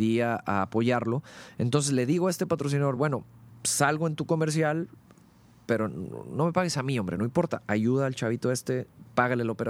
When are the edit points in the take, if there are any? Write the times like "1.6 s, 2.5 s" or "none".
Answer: none